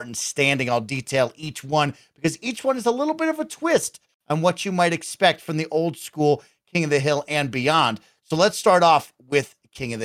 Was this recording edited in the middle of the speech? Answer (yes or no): no